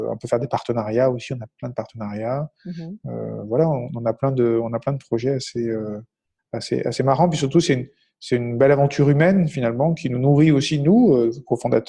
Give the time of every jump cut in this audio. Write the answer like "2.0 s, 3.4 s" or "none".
none

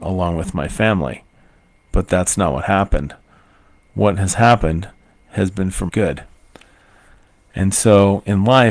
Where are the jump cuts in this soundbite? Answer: 5.9 s

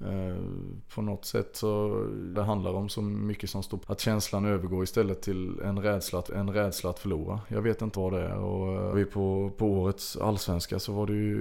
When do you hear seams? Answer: 2.3 s, 3.8 s, 6.3 s, 7.9 s, 8.9 s

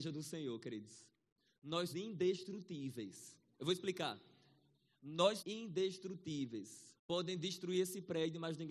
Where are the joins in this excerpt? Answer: 1.9 s, 5.4 s, 7.0 s

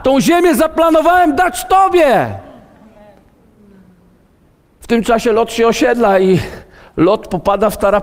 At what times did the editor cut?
none

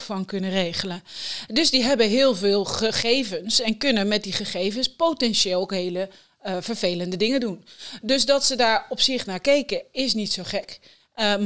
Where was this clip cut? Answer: none

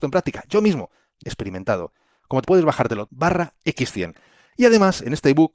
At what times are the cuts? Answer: 1.2 s, 2.4 s, 3.1 s

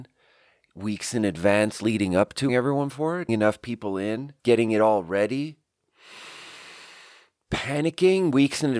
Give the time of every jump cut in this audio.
2.5 s, 3.3 s, 4.4 s

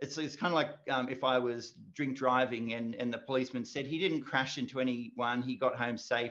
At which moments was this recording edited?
none

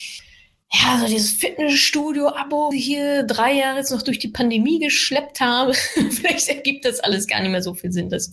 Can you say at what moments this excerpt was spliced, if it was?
2.7 s

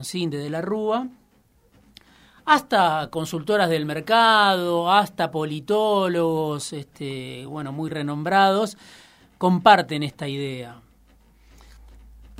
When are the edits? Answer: none

